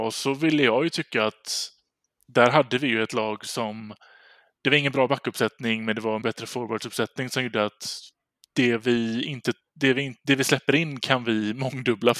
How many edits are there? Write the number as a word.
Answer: one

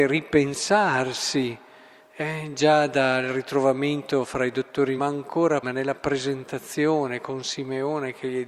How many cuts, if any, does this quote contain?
two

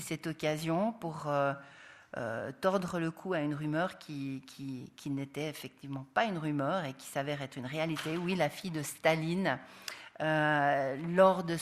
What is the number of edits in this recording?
zero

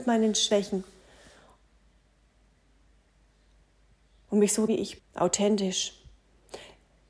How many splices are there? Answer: two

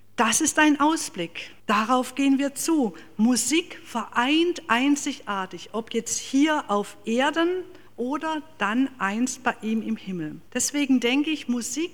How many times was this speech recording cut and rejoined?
three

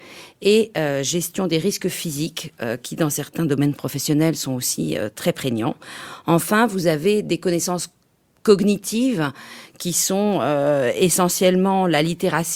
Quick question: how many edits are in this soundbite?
zero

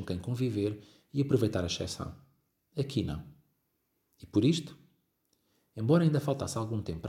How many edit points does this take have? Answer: zero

